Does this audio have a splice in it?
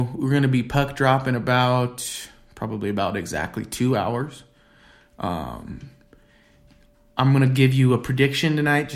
no; 0 cuts

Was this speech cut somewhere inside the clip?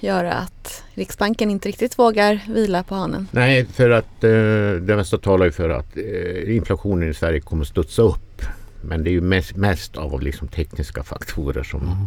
no; 0 cuts

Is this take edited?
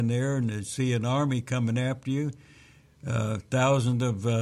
no; 0 cuts

